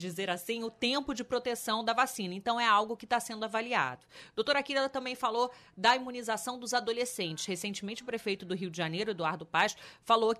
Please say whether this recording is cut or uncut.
uncut